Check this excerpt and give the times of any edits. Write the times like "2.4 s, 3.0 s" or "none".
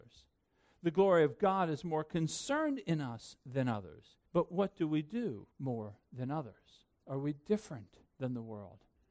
4.3 s, 5.5 s, 6.9 s, 8.1 s